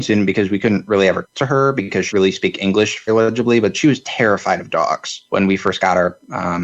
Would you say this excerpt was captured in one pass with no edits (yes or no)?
no